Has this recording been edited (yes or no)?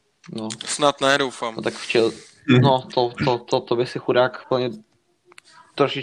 no